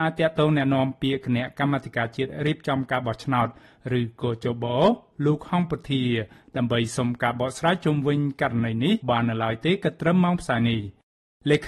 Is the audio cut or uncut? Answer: cut